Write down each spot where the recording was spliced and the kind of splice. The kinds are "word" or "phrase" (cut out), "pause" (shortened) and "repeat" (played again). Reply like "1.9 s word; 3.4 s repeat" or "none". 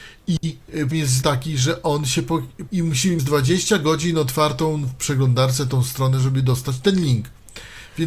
0.9 s word; 1.2 s word; 2.7 s phrase; 3.2 s phrase